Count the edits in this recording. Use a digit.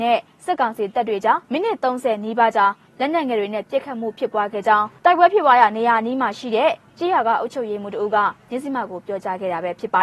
1